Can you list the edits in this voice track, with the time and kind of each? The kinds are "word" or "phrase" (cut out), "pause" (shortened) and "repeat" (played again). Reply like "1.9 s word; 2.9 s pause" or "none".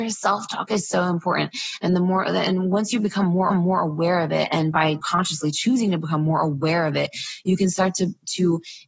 3.5 s repeat; 5.0 s phrase